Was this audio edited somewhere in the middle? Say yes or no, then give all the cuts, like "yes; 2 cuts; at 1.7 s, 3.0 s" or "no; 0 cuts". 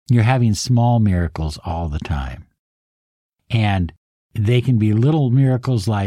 no; 0 cuts